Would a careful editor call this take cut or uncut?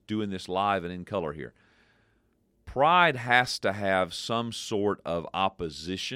uncut